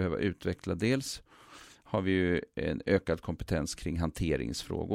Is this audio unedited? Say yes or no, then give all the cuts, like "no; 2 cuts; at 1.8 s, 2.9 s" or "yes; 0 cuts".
yes; 0 cuts